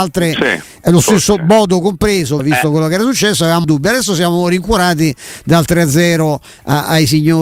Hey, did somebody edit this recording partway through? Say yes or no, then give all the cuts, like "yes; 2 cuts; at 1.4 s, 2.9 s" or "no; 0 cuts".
yes; 2 cuts; at 2.4 s, 3.6 s